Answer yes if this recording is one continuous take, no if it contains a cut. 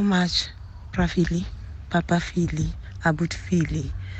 yes